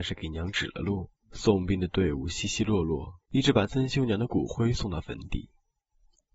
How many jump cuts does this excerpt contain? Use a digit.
2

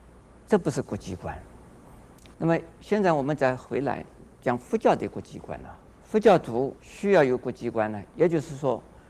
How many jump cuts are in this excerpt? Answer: 3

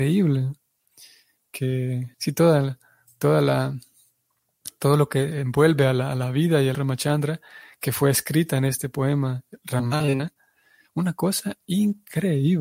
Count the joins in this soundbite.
2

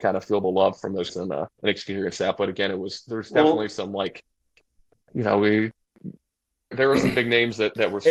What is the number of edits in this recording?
3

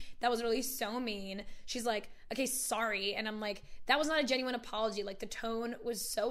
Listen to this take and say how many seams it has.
0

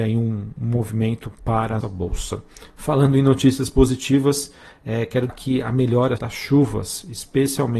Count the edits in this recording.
4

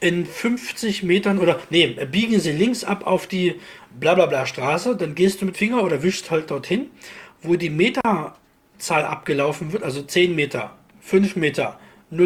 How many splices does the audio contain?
1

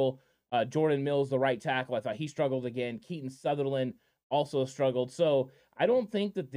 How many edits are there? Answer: 0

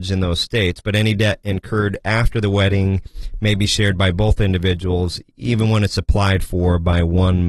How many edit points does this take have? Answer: 0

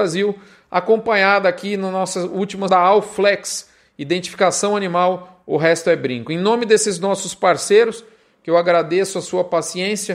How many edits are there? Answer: 1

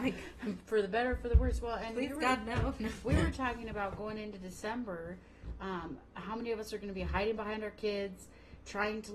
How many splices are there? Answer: 0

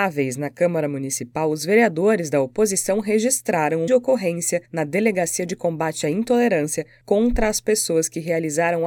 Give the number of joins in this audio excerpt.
2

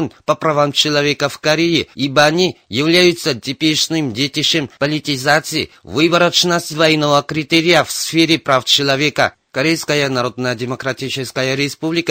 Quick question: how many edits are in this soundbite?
3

